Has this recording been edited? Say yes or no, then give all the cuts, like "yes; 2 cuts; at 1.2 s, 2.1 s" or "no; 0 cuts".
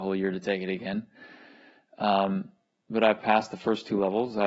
no; 0 cuts